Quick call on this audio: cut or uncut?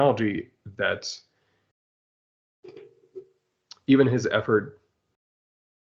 uncut